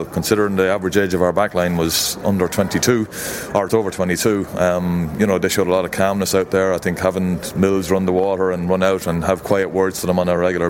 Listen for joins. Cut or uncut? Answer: cut